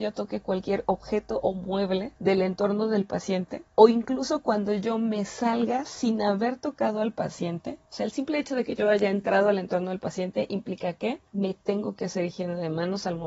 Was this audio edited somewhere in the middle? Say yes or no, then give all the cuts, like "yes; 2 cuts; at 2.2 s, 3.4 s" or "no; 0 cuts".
yes; 3 cuts; at 2.2 s, 3.7 s, 11.3 s